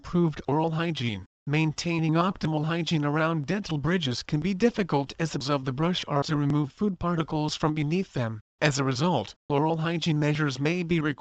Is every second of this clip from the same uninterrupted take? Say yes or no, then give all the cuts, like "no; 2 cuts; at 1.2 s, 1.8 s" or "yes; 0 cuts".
no; 4 cuts; at 5.4 s, 6.2 s, 8.5 s, 9.5 s